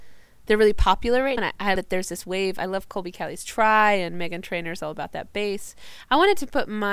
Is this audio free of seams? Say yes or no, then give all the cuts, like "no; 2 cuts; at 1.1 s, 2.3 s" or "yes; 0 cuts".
no; 2 cuts; at 1.4 s, 1.8 s